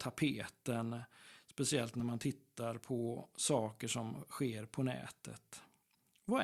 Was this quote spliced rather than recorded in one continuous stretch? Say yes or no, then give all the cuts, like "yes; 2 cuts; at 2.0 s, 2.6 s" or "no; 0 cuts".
no; 0 cuts